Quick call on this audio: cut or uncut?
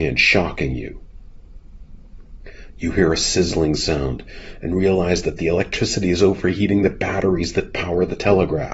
uncut